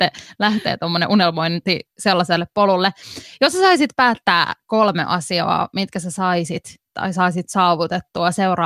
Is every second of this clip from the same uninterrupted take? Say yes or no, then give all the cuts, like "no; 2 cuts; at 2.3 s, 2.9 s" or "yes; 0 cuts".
yes; 0 cuts